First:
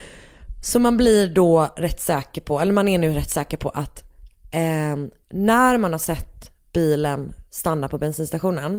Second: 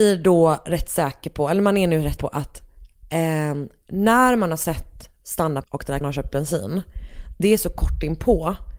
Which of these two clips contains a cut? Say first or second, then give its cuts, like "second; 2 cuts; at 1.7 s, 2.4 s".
second; 4 cuts; at 2.2 s, 5.2 s, 5.6 s, 6.0 s